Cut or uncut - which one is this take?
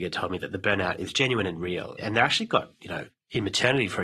uncut